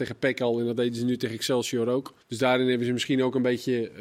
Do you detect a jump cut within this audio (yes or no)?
yes